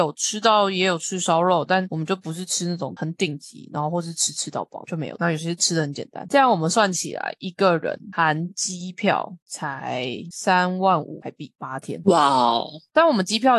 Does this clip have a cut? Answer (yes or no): yes